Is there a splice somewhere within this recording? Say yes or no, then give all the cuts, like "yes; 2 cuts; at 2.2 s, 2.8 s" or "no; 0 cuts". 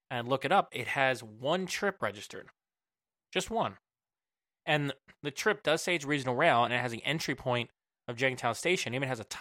no; 0 cuts